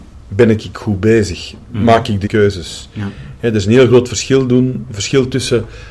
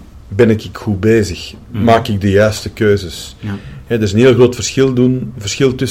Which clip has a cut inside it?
first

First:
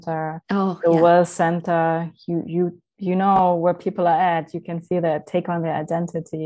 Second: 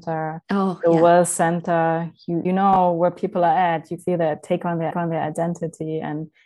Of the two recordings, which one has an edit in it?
second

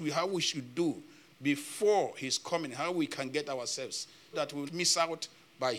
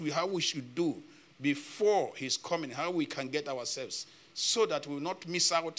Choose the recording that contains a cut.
first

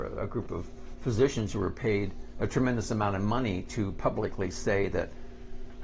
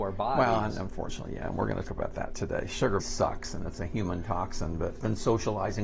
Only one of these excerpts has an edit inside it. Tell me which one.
second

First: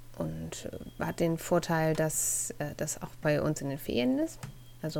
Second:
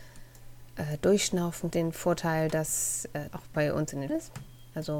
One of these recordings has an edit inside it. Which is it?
second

